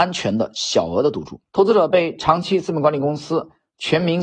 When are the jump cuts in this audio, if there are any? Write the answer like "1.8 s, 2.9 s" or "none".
1.5 s